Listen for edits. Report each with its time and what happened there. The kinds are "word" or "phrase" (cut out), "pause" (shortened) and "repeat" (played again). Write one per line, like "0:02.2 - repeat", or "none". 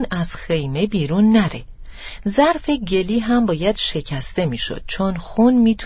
none